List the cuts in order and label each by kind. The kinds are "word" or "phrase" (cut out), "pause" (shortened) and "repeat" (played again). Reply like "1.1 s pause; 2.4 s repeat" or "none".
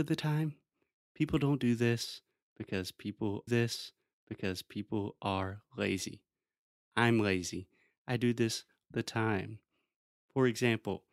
3.5 s repeat; 8.8 s word